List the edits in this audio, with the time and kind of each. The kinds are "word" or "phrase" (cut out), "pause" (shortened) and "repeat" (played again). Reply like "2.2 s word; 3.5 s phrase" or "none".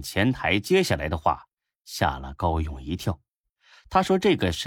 none